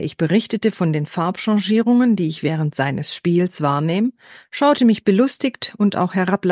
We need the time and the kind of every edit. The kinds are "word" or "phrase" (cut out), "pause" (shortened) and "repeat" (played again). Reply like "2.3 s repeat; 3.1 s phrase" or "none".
none